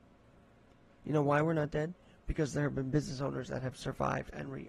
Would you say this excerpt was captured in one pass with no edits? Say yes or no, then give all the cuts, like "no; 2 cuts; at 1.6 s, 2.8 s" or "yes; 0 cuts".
yes; 0 cuts